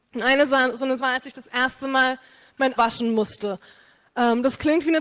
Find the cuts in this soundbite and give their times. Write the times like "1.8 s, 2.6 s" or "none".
1.0 s, 2.8 s